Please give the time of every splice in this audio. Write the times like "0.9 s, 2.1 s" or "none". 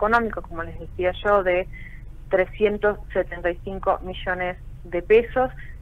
none